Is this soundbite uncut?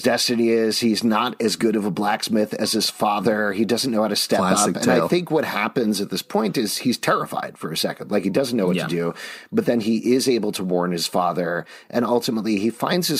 yes; 0 cuts

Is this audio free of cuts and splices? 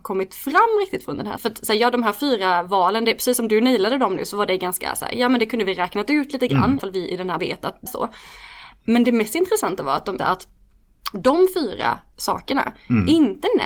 no; 5 cuts; at 1.4 s, 6.8 s, 7.4 s, 7.9 s, 10.2 s

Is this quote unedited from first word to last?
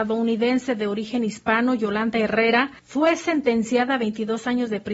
no; 1 cut; at 2.8 s

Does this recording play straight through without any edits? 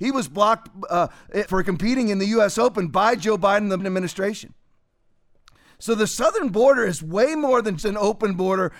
no; 3 cuts; at 1.5 s, 3.8 s, 7.8 s

